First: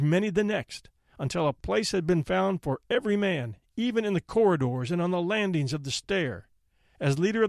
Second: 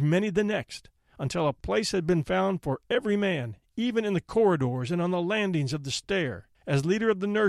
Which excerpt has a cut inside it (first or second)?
second